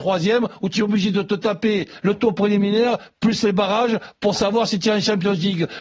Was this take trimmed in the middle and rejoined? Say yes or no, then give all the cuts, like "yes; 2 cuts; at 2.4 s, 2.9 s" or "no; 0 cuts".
no; 0 cuts